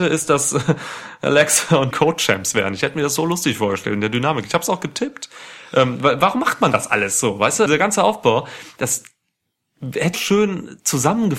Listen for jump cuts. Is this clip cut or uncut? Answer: cut